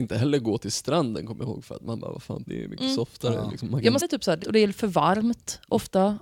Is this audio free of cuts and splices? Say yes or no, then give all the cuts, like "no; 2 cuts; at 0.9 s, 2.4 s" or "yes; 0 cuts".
no; 3 cuts; at 2.5 s, 4.0 s, 4.4 s